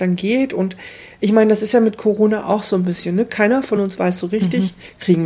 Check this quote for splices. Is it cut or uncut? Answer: uncut